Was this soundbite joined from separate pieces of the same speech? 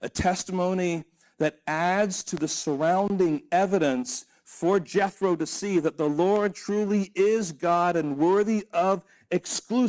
no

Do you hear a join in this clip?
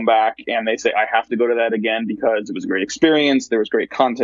no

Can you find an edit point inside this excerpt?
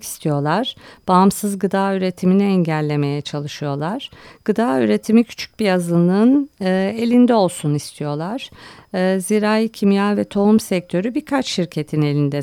no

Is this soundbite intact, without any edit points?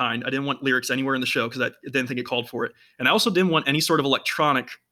yes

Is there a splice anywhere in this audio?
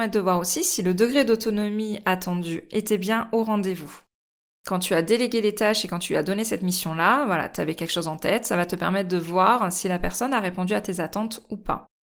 no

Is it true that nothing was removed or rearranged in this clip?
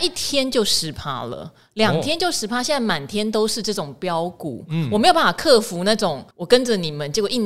no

